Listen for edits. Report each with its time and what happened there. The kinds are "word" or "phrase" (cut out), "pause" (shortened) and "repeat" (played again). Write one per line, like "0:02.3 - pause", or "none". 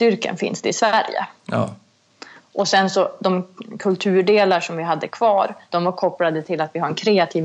none